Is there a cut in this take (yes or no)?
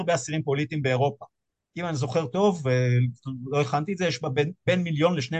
no